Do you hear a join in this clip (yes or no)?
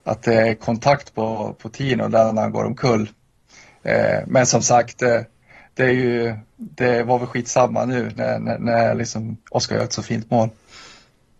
no